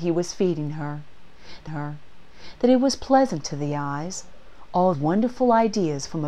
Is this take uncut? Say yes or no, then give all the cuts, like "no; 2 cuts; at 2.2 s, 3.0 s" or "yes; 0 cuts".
no; 2 cuts; at 1.7 s, 4.9 s